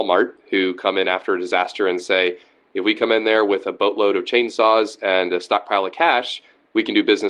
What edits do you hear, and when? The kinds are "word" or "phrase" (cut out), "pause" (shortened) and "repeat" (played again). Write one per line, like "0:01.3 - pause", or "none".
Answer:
none